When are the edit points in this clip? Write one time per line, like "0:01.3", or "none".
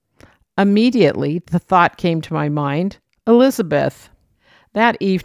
none